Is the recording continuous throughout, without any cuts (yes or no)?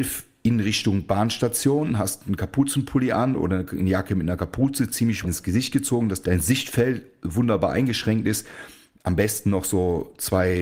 no